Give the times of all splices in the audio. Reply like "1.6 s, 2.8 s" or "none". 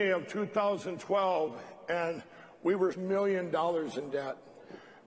2.9 s